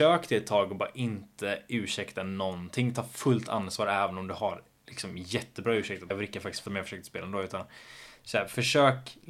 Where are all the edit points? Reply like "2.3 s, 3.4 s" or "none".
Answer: 6.1 s, 6.7 s